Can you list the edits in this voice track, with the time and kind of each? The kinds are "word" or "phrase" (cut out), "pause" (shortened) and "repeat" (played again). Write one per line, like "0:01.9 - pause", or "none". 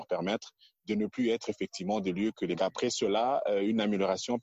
0:02.6 - phrase